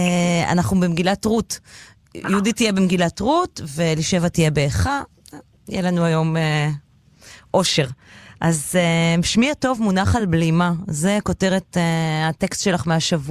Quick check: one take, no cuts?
yes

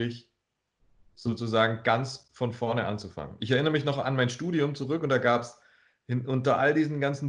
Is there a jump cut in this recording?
no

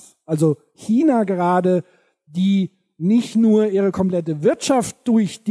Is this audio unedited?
yes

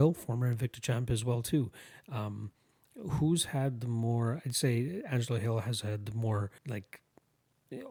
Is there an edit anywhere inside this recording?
yes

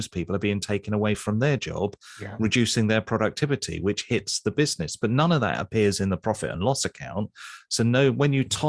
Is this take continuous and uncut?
yes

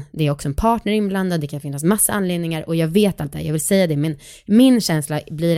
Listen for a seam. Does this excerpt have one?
no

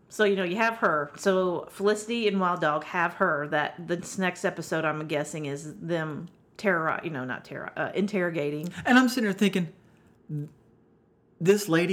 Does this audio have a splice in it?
no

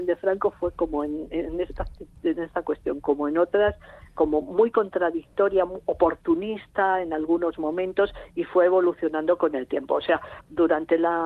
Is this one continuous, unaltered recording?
yes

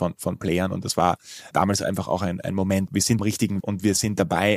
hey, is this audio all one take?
no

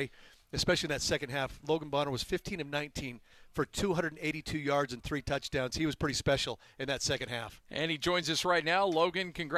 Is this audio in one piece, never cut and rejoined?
yes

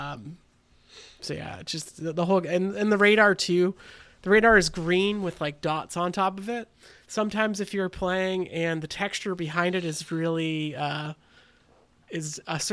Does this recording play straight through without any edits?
yes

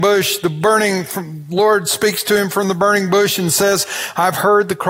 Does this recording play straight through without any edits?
yes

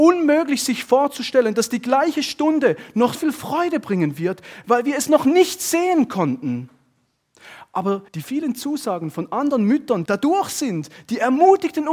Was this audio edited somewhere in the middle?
yes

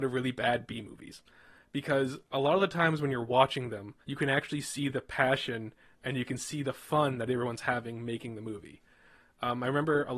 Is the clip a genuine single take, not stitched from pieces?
no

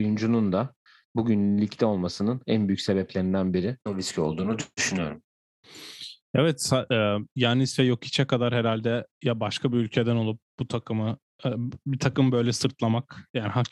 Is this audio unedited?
no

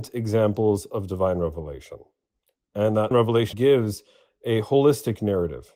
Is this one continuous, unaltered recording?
no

